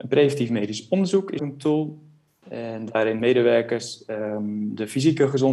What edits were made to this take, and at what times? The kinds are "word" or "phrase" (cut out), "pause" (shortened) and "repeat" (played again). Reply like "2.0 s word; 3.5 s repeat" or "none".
1.4 s word; 3.2 s word